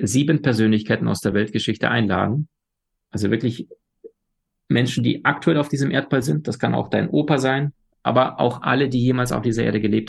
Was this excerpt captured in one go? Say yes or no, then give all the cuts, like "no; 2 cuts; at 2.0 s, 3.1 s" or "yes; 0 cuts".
yes; 0 cuts